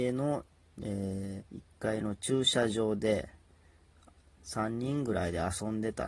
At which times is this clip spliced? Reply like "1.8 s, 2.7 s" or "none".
1.5 s